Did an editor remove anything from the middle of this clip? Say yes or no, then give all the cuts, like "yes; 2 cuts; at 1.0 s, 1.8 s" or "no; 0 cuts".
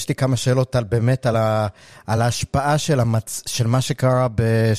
no; 0 cuts